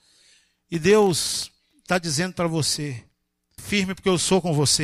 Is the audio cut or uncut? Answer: cut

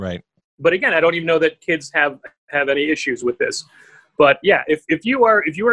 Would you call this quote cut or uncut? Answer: uncut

